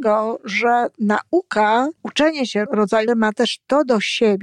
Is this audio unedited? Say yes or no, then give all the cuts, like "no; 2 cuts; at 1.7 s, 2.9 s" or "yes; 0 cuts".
no; 3 cuts; at 2.0 s, 2.7 s, 3.1 s